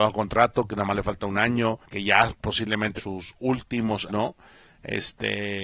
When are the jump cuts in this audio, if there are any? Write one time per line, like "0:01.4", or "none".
0:01.8
0:03.0
0:04.1